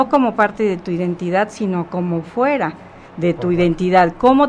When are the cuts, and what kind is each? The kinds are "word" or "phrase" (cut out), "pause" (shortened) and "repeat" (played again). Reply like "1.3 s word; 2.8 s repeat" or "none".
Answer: none

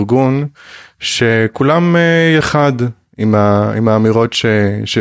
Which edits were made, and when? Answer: 2.4 s phrase

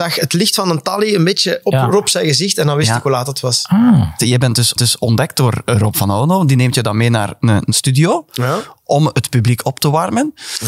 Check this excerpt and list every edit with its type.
4.8 s repeat

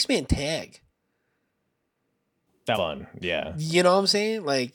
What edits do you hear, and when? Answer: 2.7 s word

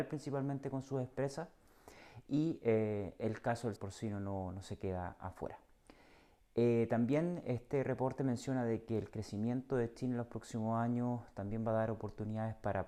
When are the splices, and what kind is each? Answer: 3.8 s word

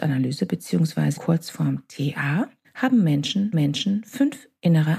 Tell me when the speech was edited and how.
1.2 s word; 2.6 s pause; 3.5 s repeat

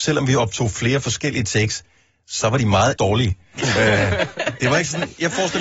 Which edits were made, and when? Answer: 3.0 s word

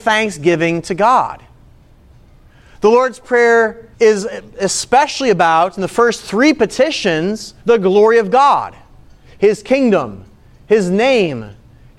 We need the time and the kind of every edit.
3.9 s pause; 7.6 s pause

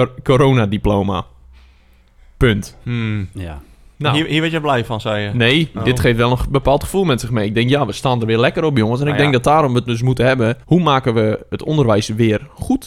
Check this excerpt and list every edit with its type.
10.6 s pause

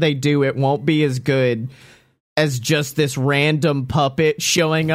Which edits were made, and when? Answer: none

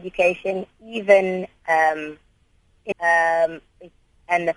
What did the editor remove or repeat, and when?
2.9 s phrase

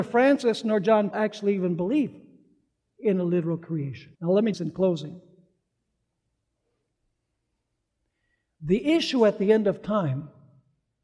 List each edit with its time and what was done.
1.1 s word; 4.1 s pause; 4.5 s phrase

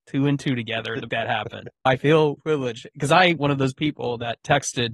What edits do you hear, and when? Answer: 1.1 s word; 1.9 s word; 2.4 s word; 3.4 s word

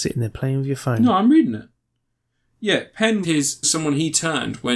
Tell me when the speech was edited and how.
3.2 s word; 3.6 s word

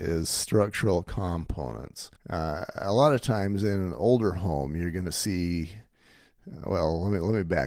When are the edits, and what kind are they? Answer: 2.2 s pause

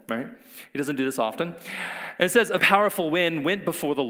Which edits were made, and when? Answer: 2.6 s word

